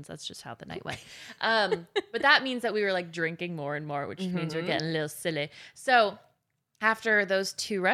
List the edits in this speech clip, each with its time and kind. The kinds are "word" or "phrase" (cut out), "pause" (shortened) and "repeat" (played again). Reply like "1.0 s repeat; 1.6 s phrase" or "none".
none